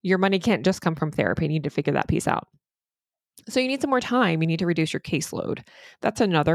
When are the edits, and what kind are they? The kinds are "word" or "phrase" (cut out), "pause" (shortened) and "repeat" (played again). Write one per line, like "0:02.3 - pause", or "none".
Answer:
none